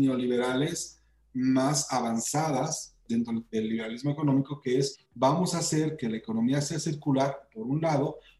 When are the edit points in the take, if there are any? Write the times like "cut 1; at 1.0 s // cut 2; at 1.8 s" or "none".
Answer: cut 1; at 5.1 s